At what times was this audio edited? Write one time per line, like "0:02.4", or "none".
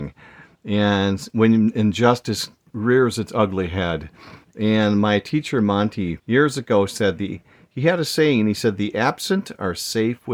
0:06.2

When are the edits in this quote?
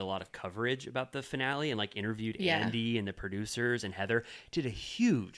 none

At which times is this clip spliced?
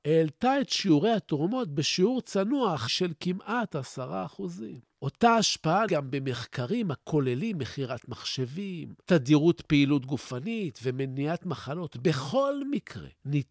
0:02.9
0:05.9

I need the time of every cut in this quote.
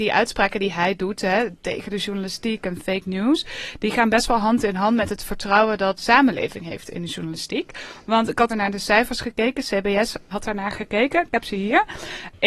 0:06.0
0:08.5
0:10.3

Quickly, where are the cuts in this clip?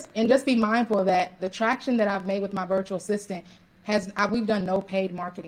0:01.4

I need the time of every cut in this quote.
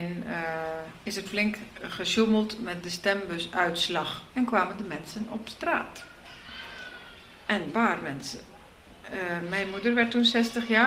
0:01.2
0:04.3
0:07.7

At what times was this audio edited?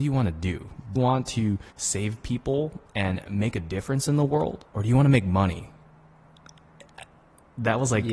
0:00.9
0:01.7
0:04.7

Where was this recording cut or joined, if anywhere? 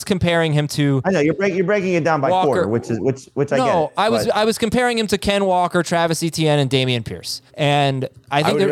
0:07.5

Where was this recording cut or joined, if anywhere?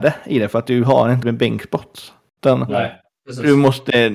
0:01.2

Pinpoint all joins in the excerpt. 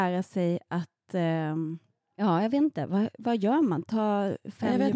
none

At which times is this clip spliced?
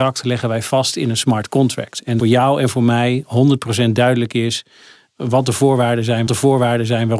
0:02.2
0:06.3

